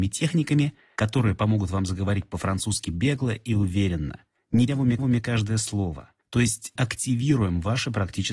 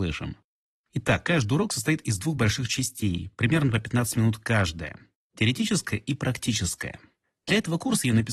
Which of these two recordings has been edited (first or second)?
first